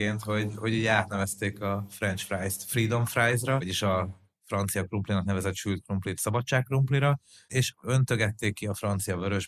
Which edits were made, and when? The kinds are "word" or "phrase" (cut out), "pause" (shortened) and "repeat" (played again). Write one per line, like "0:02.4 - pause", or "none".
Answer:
none